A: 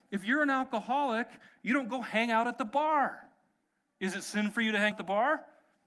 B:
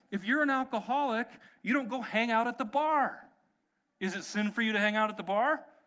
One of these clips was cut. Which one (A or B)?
A